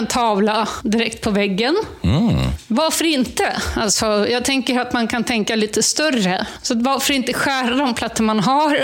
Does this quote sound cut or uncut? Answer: uncut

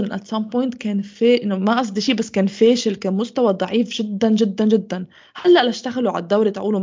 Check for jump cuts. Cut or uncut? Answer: uncut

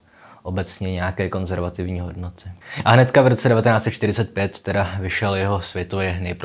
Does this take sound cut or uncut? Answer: cut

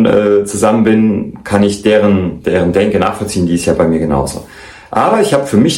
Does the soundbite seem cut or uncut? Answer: uncut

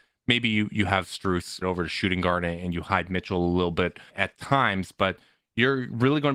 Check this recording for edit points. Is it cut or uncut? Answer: cut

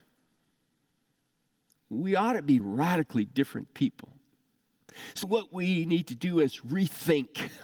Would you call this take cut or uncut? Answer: cut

